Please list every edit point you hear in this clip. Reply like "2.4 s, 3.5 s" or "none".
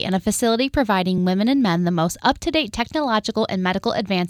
none